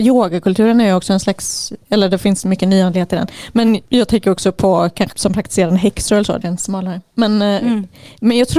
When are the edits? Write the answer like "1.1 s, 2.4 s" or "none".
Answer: 3.9 s, 5.1 s, 6.4 s